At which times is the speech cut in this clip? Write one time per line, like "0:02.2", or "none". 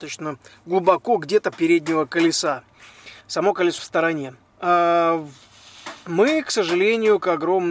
0:01.5
0:03.2
0:03.8
0:04.5

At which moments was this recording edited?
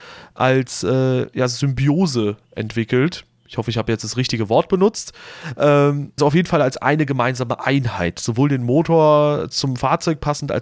0:06.2

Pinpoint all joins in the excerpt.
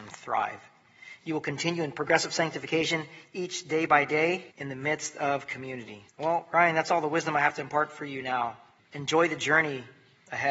0:04.5
0:06.1
0:08.8

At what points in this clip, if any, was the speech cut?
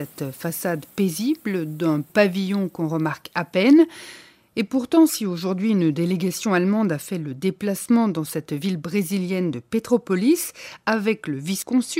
none

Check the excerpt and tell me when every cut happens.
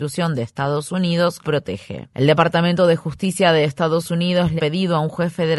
0:01.4
0:04.6

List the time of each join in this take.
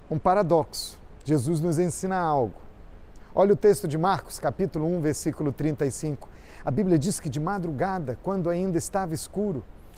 none

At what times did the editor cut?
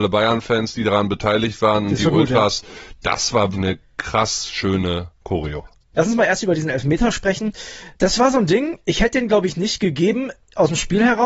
0:03.5
0:05.1
0:07.9

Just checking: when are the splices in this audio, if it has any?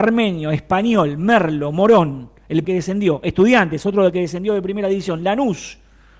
0:02.6

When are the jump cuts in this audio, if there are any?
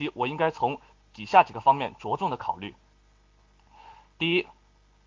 none

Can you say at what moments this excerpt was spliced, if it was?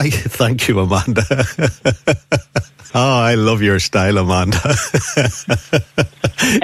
0:02.9

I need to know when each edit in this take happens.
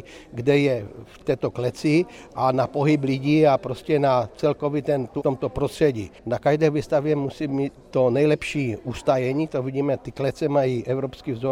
0:05.2
0:06.2

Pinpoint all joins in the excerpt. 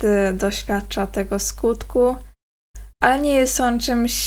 0:02.9

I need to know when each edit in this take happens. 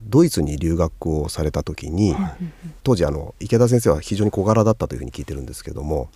0:02.8

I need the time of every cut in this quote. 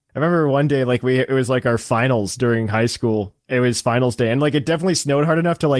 0:03.4

